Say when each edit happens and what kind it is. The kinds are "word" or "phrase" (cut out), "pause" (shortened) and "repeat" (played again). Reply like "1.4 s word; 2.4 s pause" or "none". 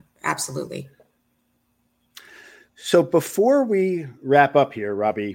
none